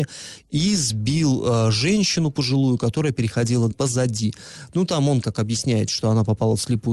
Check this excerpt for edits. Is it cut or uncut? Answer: cut